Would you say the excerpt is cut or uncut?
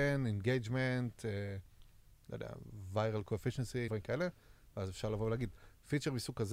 cut